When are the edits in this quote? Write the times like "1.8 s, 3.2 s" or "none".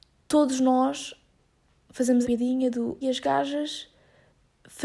2.2 s, 3.0 s